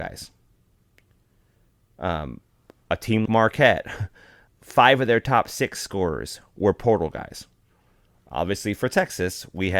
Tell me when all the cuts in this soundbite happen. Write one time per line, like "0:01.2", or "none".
0:03.3
0:04.5